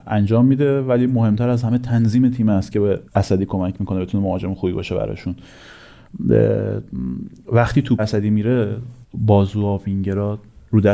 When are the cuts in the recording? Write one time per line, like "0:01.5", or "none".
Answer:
0:03.1
0:08.0
0:09.0